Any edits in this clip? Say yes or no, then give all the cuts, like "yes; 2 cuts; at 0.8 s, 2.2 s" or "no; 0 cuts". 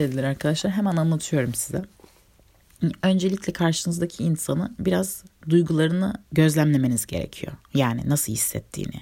yes; 2 cuts; at 4.8 s, 6.3 s